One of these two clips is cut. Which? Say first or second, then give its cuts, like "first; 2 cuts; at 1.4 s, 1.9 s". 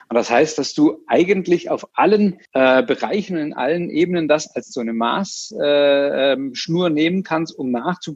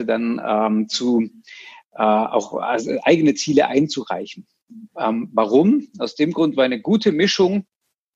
first; 1 cut; at 2.5 s